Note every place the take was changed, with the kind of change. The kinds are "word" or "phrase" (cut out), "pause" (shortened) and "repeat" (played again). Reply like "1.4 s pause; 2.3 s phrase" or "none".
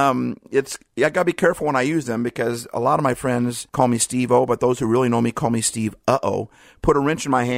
3.7 s pause